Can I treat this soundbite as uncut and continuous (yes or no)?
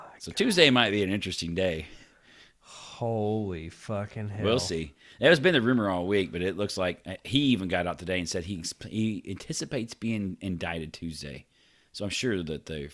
yes